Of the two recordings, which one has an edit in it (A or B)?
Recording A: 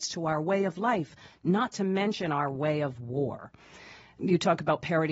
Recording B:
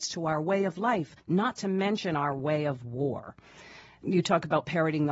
B